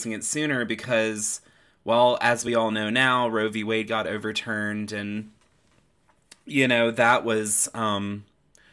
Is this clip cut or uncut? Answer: uncut